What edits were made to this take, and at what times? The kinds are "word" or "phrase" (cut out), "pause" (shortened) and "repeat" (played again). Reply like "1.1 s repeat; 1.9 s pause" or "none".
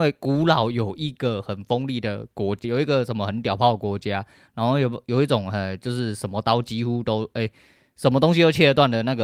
2.6 s word